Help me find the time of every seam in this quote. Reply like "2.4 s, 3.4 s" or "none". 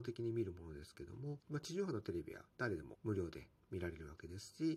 2.5 s